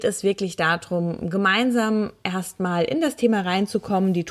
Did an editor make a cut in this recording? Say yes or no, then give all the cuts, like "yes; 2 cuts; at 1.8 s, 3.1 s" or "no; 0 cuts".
no; 0 cuts